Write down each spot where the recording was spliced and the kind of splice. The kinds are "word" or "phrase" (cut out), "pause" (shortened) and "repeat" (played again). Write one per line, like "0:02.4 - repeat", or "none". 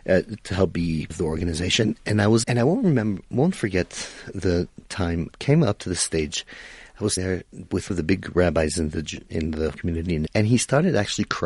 0:01.1 - word
0:02.4 - word
0:05.3 - word
0:07.2 - word
0:07.9 - word
0:09.7 - word
0:10.3 - word